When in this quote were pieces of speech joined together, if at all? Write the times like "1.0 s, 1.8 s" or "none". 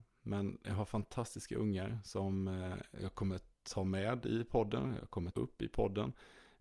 5.3 s